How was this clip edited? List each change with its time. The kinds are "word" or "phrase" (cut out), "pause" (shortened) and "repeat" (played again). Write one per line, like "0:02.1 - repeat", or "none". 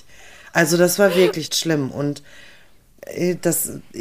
0:01.5 - phrase